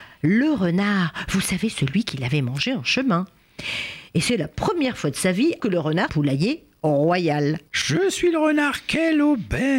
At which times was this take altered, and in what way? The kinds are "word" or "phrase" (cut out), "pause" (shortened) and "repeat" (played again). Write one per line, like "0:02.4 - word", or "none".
0:05.6 - word
0:06.1 - phrase
0:07.7 - pause